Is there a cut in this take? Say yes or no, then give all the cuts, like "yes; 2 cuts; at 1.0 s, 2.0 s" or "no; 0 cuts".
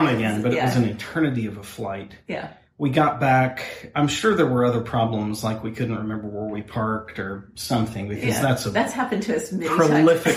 no; 0 cuts